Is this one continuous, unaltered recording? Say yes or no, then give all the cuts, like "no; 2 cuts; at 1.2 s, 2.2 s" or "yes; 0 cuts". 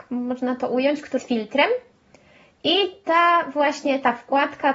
no; 1 cut; at 1.2 s